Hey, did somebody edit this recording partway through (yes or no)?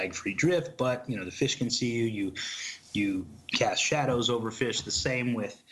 no